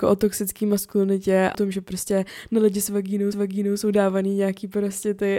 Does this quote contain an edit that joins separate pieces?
yes; 2 cuts; at 1.5 s, 3.3 s

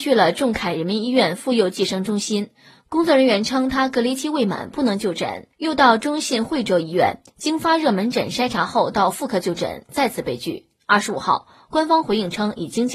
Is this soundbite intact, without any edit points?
yes; 0 cuts

